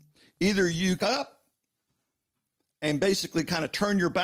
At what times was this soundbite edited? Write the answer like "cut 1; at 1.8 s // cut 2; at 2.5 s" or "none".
cut 1; at 1.0 s